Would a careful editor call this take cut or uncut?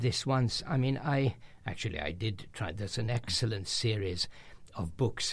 uncut